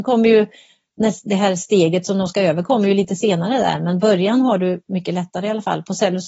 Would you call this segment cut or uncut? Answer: uncut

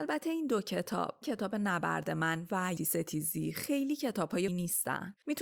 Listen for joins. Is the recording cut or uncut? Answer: cut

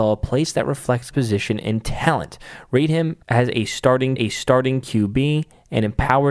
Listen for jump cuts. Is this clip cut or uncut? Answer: cut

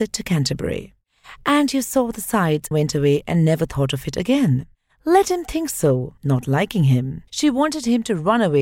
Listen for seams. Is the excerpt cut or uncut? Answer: cut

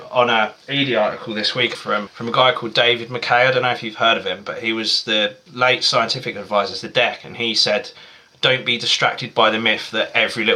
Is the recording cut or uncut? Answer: cut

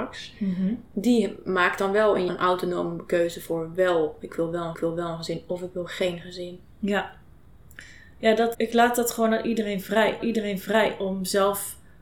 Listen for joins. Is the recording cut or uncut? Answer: cut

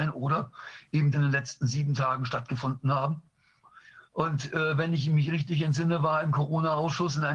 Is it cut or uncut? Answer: cut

